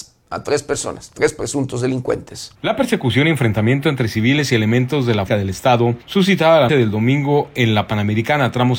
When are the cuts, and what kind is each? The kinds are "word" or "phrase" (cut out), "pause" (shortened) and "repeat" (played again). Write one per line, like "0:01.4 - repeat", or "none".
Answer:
0:02.6 - pause
0:05.3 - phrase
0:06.7 - word